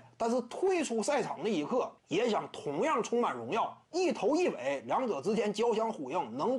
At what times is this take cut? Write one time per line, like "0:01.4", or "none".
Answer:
0:02.0
0:03.8